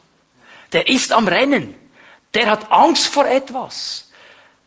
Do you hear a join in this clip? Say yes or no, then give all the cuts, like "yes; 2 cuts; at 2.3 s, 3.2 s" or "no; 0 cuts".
no; 0 cuts